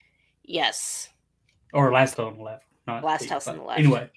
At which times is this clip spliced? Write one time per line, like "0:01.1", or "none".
0:02.1
0:03.0